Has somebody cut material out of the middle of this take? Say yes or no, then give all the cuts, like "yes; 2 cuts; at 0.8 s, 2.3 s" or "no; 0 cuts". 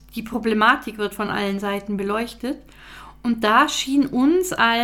no; 0 cuts